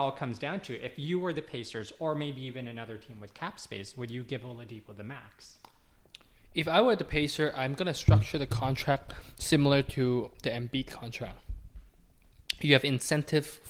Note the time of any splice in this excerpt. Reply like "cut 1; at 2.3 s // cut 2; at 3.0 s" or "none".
none